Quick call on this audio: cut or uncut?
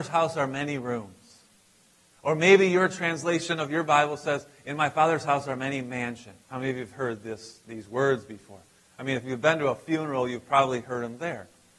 cut